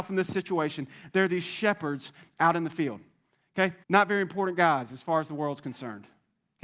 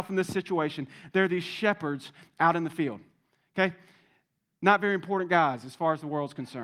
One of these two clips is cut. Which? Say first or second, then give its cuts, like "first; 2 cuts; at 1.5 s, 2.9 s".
first; 1 cut; at 3.8 s